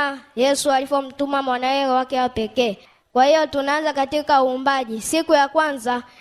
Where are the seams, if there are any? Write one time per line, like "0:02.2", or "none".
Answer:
none